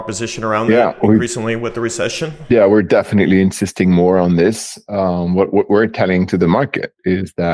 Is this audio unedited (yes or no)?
yes